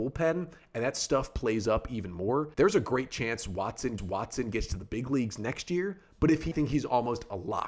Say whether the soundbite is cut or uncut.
cut